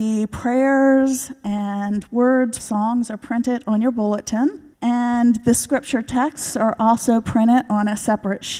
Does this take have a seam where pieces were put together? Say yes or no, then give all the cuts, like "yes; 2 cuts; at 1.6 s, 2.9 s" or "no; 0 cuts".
yes; 2 cuts; at 2.6 s, 4.7 s